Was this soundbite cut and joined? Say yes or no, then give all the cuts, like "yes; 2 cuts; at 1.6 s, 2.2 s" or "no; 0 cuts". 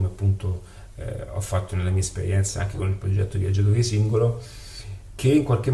no; 0 cuts